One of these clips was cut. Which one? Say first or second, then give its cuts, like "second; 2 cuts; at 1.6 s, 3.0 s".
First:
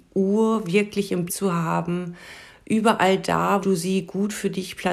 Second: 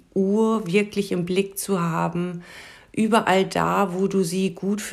first; 2 cuts; at 1.3 s, 3.6 s